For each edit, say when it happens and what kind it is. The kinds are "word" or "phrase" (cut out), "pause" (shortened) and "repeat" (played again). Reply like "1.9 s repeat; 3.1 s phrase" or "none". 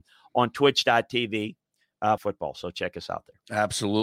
2.2 s phrase